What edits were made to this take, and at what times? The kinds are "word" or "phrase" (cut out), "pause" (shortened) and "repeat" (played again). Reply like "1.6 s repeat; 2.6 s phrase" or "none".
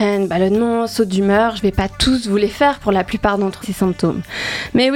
3.6 s phrase